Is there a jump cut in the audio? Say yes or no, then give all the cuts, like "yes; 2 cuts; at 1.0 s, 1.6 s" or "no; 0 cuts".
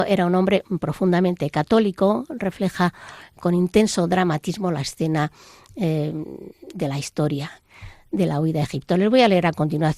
no; 0 cuts